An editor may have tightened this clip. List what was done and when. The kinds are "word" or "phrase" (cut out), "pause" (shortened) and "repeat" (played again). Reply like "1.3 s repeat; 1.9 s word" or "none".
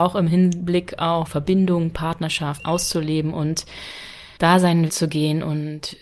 1.3 s word; 2.6 s word; 4.4 s pause; 4.9 s word